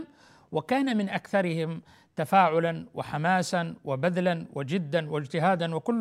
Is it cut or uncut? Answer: uncut